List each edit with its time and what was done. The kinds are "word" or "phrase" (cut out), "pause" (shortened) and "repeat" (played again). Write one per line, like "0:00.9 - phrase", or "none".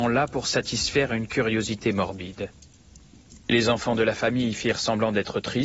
none